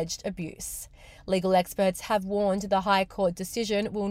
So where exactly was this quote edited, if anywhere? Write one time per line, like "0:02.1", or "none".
none

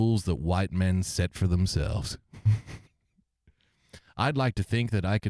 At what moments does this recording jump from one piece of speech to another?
0:02.8

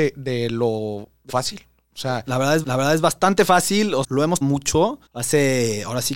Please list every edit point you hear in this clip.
0:01.3
0:02.6
0:04.0
0:04.4
0:05.1

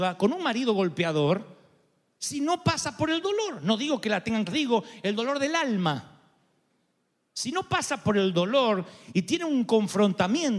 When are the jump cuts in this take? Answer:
0:04.5

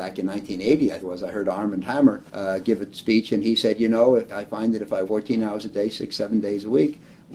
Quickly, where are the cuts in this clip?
0:01.0
0:02.3
0:04.3
0:05.0

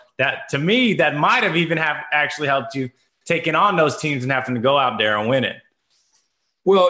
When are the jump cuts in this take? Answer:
none

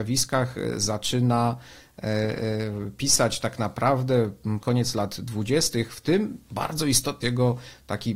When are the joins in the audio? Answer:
0:04.6
0:07.2

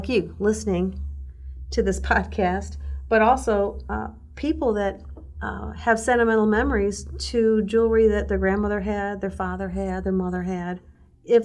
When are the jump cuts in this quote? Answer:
none

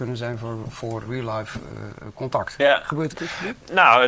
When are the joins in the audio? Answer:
0:01.0
0:03.1

